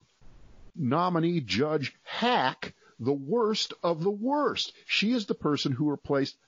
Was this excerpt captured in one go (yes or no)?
yes